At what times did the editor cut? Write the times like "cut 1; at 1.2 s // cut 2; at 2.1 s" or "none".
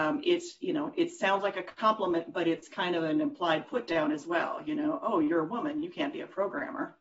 none